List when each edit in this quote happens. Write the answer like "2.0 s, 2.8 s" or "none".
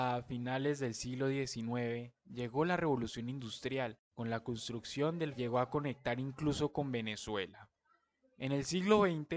4.0 s, 5.4 s